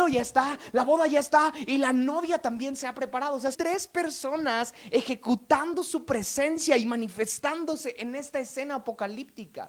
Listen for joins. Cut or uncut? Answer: cut